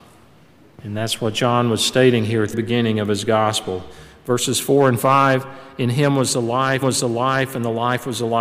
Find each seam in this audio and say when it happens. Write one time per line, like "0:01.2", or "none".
0:02.5
0:06.8